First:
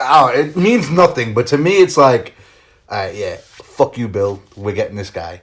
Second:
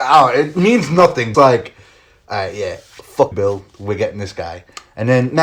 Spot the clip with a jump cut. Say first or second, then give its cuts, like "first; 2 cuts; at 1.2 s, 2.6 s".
second; 2 cuts; at 1.3 s, 3.3 s